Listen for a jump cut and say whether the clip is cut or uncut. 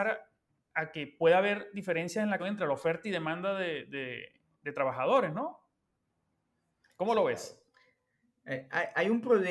cut